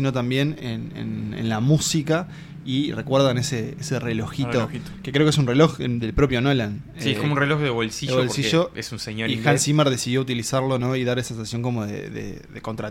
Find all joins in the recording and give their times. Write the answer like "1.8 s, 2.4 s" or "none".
none